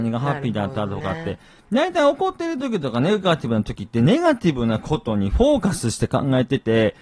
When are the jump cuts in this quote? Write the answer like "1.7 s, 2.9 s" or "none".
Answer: none